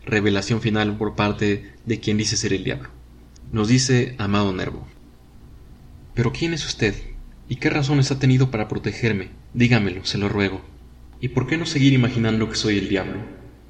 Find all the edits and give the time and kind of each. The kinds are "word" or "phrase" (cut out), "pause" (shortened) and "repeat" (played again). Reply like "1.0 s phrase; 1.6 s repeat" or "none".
9.4 s pause; 11.1 s pause

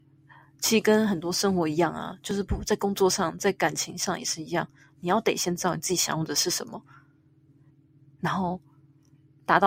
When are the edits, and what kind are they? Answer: none

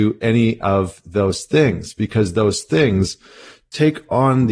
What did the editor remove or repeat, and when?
none

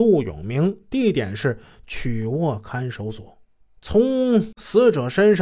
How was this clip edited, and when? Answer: 3.6 s pause

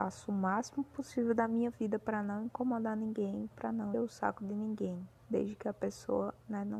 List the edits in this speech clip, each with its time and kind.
3.9 s word; 5.2 s pause

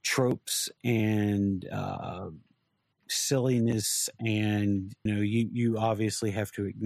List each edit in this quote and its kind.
5.1 s word

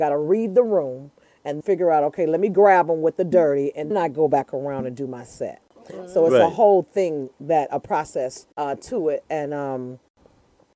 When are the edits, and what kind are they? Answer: 1.6 s word; 3.9 s word; 8.5 s pause

